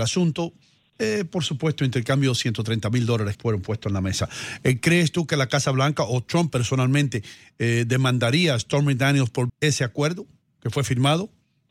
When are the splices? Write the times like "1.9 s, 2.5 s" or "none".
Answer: 3.3 s, 9.5 s